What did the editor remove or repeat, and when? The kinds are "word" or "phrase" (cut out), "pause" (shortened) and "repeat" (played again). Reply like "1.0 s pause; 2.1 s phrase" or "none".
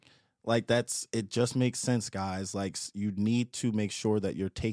none